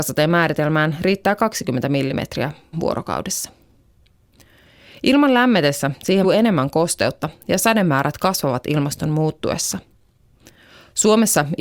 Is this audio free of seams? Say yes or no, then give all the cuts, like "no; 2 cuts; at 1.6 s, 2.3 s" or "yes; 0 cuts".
no; 2 cuts; at 2.7 s, 6.2 s